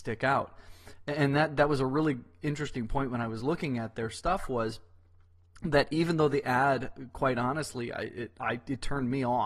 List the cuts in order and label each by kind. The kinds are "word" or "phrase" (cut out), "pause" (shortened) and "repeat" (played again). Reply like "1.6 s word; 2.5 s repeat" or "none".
none